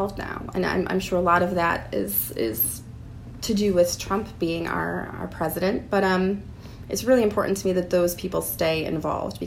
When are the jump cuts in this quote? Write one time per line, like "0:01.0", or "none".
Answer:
none